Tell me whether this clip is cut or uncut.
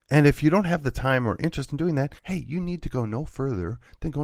cut